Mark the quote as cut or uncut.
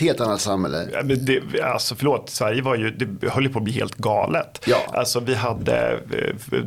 uncut